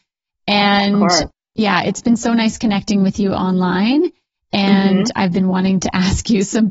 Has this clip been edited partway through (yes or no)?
no